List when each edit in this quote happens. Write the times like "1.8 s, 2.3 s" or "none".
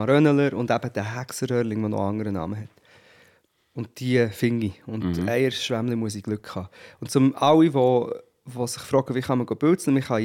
none